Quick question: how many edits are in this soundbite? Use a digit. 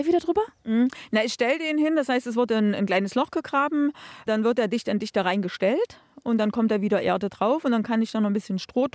0